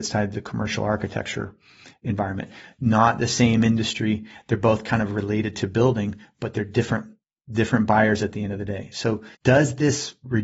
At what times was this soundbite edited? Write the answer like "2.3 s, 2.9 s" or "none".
9.3 s